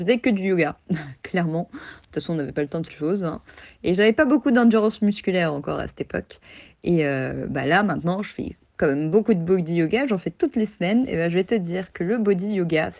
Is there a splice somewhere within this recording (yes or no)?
yes